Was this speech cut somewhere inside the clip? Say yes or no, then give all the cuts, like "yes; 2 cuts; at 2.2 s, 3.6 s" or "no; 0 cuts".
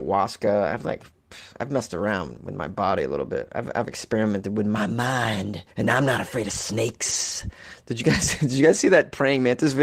yes; 1 cut; at 5.7 s